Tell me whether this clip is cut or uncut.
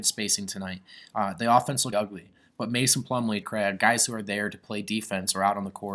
cut